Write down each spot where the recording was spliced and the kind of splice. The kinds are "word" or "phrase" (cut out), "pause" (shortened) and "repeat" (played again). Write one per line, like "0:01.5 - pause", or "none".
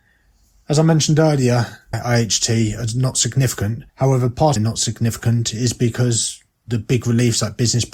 0:01.9 - phrase
0:03.9 - pause
0:04.6 - phrase